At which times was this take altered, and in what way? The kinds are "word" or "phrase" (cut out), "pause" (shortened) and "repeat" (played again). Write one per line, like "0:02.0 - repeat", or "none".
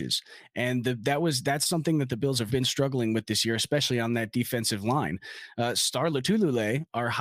0:02.5 - word

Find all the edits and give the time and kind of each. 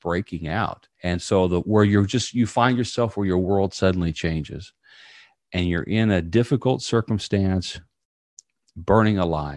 0:00.9 - pause

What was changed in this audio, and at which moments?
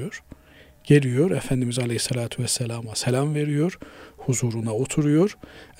none

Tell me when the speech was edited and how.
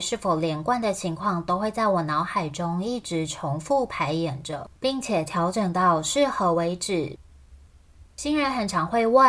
0:04.8 - pause
0:08.1 - pause

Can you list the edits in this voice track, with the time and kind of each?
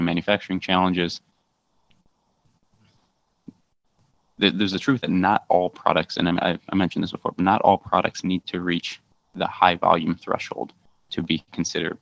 0:05.0 - word

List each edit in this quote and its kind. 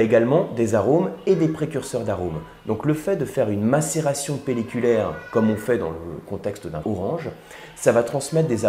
0:06.8 - word

